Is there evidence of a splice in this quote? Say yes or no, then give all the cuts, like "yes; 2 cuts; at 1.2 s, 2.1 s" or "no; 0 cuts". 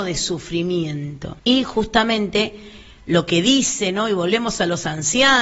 yes; 1 cut; at 1.4 s